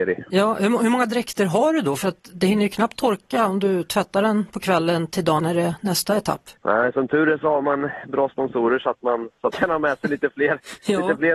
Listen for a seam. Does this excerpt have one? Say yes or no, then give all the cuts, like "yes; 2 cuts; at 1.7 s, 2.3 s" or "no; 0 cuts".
yes; 3 cuts; at 5.4 s, 6.6 s, 9.5 s